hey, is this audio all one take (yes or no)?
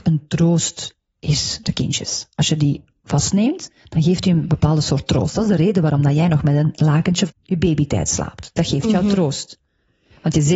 no